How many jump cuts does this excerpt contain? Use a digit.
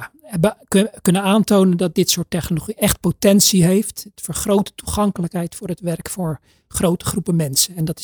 0